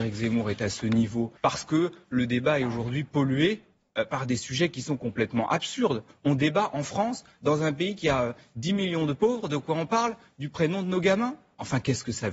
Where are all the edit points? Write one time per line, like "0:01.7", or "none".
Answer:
0:01.4